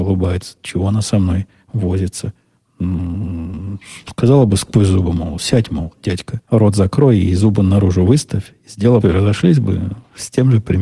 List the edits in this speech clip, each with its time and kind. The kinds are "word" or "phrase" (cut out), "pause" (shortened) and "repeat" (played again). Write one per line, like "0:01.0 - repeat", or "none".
0:06.4 - pause
0:09.0 - phrase